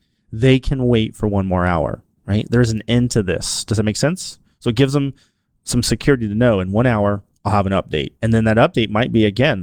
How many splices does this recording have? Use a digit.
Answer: 2